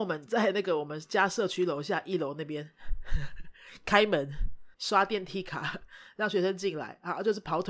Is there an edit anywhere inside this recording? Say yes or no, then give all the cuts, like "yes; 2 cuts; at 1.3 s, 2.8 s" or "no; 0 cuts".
yes; 1 cut; at 4.7 s